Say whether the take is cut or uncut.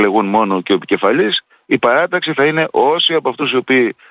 uncut